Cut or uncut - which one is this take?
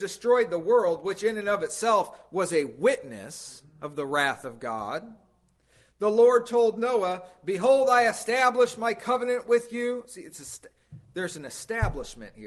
uncut